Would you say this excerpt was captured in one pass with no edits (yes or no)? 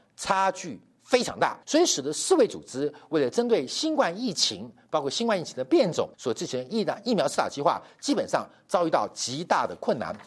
no